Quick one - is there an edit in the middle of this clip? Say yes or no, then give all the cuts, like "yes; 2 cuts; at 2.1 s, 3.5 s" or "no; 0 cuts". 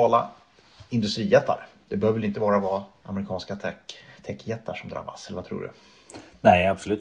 no; 0 cuts